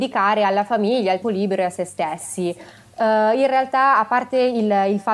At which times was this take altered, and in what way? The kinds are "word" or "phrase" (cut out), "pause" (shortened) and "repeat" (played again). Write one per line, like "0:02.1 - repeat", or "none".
0:01.2 - word

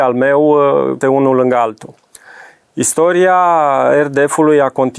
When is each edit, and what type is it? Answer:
0:01.0 - word

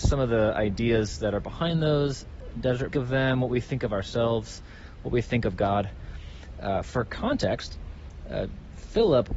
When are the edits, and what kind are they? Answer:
0:02.9 - phrase

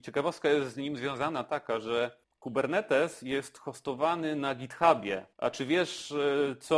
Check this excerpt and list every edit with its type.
0:02.2 - pause
0:05.3 - pause

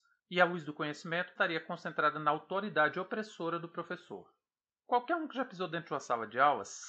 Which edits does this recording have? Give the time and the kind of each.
0:01.4 - phrase

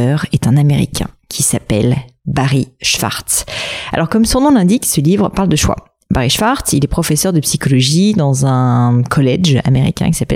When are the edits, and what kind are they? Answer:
none

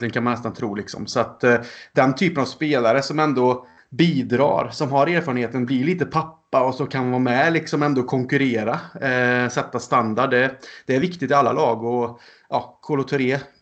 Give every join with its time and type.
none

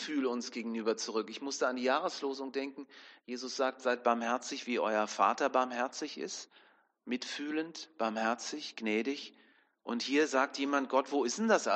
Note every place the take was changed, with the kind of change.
none

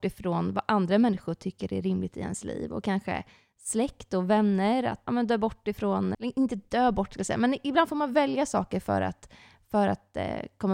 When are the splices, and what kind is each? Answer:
0:05.1 - word
0:06.1 - word

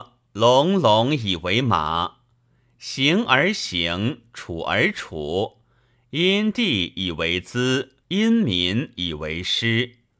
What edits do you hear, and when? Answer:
0:08.0 - pause

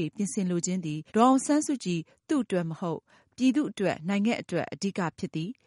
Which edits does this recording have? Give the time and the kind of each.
0:01.1 - pause

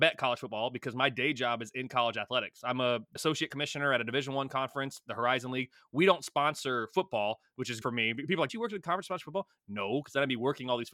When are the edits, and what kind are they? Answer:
0:03.2 - word
0:07.8 - word
0:08.5 - phrase

